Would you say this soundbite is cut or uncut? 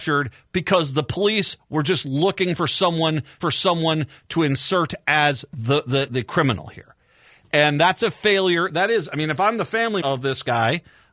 cut